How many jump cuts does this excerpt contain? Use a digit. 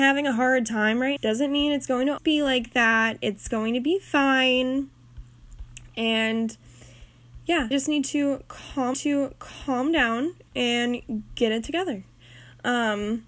4